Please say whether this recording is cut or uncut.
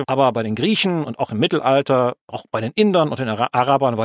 cut